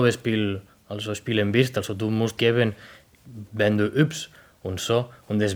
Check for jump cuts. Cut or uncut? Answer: cut